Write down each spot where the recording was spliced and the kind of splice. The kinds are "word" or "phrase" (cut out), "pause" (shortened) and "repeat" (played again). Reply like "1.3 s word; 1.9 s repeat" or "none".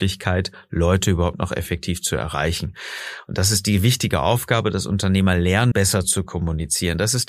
5.7 s word